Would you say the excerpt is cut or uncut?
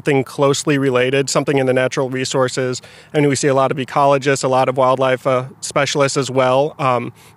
uncut